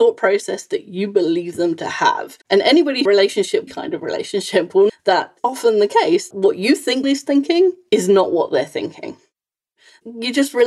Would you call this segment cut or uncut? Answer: cut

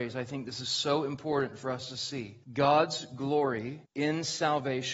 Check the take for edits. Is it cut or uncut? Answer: cut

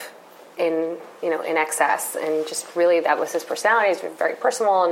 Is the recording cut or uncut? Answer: uncut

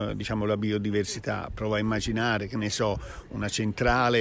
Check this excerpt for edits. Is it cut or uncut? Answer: uncut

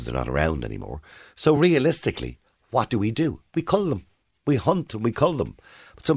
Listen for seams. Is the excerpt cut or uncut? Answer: uncut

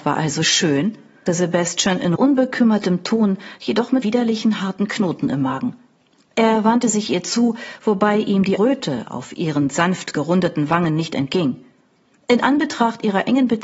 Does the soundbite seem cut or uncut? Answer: cut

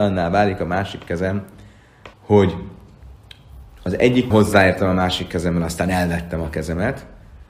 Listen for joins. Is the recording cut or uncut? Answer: cut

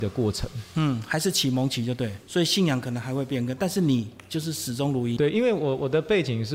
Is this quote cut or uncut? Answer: cut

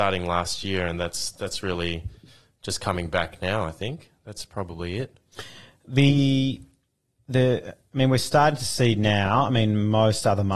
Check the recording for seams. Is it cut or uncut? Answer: uncut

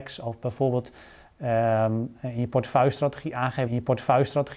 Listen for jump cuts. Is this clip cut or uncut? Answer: cut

